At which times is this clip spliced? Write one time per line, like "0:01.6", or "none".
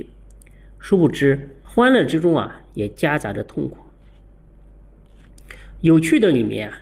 0:01.6